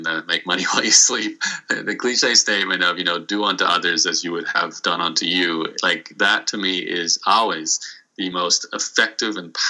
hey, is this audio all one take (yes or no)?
yes